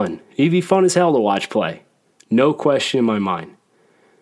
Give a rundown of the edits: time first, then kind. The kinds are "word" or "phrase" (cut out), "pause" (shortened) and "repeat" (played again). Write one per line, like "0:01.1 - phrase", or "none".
none